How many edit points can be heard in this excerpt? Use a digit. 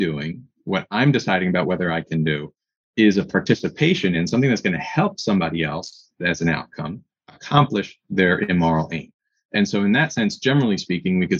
0